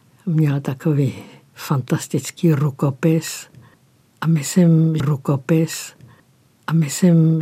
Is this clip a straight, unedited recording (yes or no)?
no